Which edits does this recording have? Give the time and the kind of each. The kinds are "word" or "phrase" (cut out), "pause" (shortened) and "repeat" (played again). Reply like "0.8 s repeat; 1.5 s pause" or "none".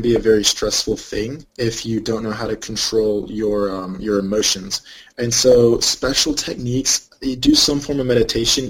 1.5 s pause